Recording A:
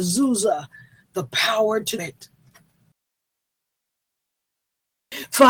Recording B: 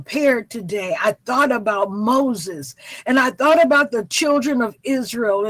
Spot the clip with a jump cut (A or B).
A